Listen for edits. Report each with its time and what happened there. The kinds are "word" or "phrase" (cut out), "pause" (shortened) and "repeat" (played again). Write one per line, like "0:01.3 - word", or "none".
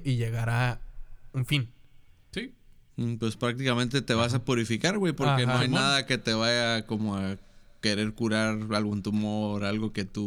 none